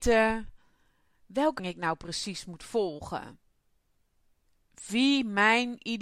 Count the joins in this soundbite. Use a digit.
1